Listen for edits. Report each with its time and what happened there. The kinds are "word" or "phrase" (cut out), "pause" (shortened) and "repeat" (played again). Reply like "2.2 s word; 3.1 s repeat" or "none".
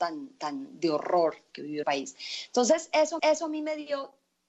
1.8 s word; 3.2 s repeat